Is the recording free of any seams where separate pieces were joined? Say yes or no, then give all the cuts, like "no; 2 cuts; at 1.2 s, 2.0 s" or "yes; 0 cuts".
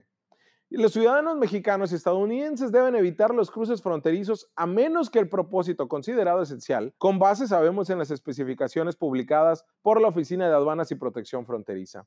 no; 2 cuts; at 7.0 s, 9.7 s